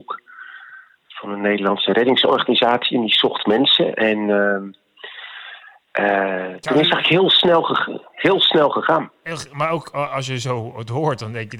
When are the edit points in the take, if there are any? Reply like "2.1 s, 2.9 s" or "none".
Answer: none